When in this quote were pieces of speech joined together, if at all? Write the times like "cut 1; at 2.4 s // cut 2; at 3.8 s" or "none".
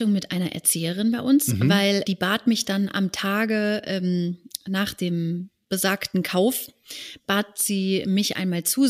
cut 1; at 2.0 s